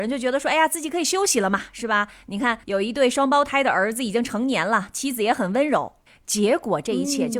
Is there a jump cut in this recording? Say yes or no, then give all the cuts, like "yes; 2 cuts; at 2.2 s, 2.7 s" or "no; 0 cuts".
yes; 2 cuts; at 2.6 s, 6.1 s